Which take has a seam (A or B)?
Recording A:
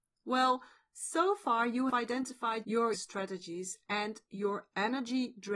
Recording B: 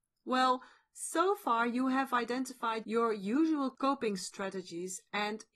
A